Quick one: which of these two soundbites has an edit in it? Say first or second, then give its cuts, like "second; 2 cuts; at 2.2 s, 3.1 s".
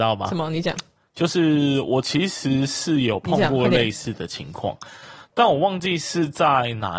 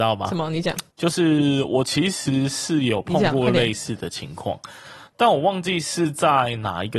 second; 1 cut; at 0.9 s